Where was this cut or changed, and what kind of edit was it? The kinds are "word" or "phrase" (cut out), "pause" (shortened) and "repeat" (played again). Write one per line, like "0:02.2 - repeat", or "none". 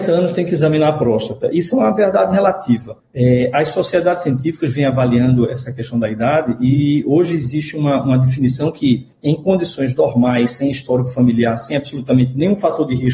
0:03.0 - pause
0:09.1 - pause